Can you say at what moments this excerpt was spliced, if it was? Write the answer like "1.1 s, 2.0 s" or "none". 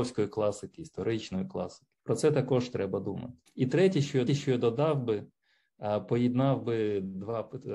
2.0 s, 3.5 s, 4.3 s